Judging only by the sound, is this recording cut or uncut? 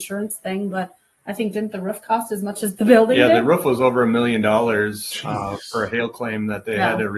uncut